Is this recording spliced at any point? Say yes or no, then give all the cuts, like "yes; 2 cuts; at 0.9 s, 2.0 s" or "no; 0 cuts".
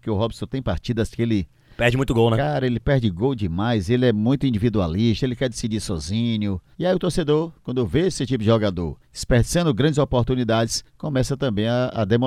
yes; 3 cuts; at 6.7 s, 9.0 s, 10.9 s